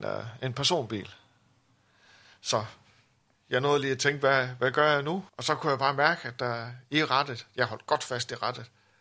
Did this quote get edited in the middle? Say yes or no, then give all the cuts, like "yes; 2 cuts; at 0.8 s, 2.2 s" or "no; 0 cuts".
yes; 1 cut; at 5.3 s